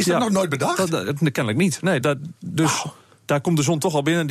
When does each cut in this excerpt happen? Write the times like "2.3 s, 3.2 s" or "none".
2.0 s